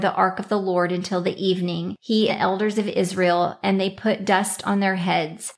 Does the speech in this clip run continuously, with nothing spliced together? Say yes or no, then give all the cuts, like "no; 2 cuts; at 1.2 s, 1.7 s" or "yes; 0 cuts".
no; 1 cut; at 2.3 s